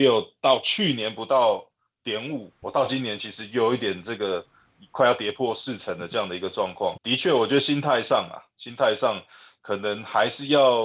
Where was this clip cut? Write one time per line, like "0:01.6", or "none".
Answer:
0:02.6
0:07.0